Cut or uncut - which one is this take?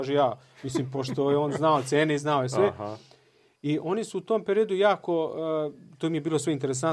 uncut